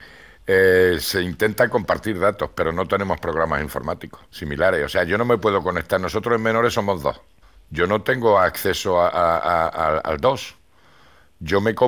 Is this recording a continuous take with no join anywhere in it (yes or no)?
no